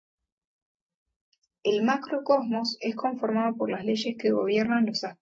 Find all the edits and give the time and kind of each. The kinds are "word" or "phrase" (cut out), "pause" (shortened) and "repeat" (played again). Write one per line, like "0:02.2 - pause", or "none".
none